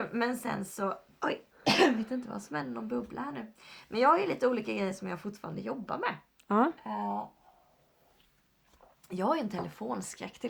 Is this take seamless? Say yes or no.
yes